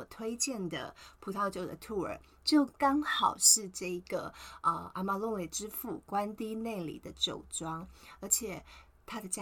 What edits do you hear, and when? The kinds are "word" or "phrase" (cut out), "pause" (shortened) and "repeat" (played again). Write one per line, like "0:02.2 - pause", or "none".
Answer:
none

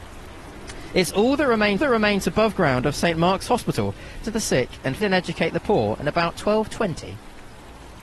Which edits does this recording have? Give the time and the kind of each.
0:01.8 - repeat
0:04.2 - phrase
0:05.0 - word

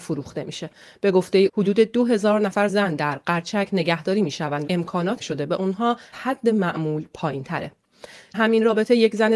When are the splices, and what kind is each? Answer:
0:01.5 - word
0:02.7 - word
0:04.7 - word
0:05.2 - word
0:06.1 - word
0:08.3 - word

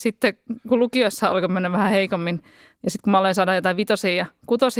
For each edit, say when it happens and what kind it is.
none

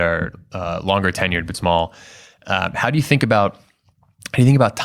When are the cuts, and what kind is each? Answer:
0:01.5 - word

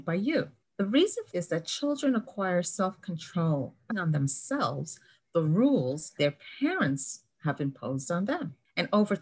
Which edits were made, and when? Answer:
0:01.3 - word
0:03.9 - word
0:06.2 - word

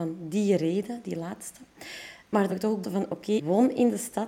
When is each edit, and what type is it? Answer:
0:02.5 - word
0:02.8 - word
0:03.4 - word

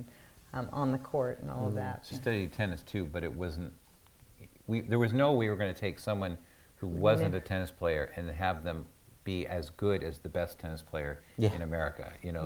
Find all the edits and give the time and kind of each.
0:02.1 - word

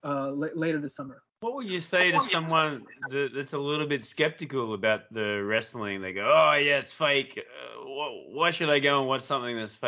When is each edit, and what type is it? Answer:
0:01.3 - pause

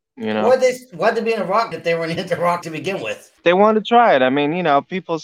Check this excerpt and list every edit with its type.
0:01.7 - word
0:02.2 - word
0:02.6 - word
0:03.4 - pause

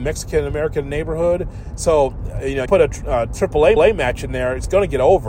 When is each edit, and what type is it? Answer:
0:02.7 - word
0:03.8 - repeat

